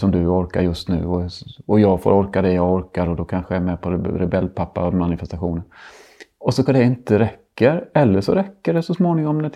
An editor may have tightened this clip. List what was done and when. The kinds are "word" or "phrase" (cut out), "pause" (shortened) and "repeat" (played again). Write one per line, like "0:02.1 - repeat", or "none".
0:06.7 - word